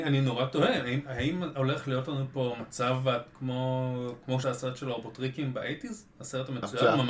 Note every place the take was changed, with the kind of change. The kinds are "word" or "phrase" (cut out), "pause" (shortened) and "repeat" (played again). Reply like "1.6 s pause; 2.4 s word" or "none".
4.4 s word